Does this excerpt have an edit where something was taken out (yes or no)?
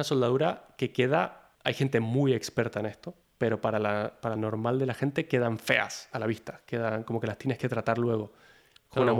yes